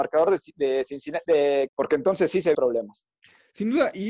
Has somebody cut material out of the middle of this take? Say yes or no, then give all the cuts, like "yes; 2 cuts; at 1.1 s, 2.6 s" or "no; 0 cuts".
yes; 2 cuts; at 1.7 s, 2.5 s